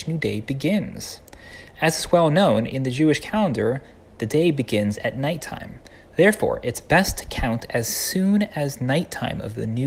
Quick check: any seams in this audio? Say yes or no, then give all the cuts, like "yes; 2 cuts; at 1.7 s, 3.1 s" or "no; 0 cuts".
no; 0 cuts